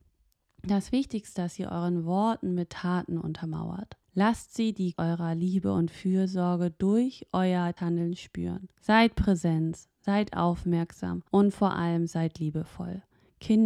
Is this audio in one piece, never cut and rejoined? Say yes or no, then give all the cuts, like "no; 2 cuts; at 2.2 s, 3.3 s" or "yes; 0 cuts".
no; 6 cuts; at 1.3 s, 4.0 s, 4.9 s, 7.8 s, 8.7 s, 11.3 s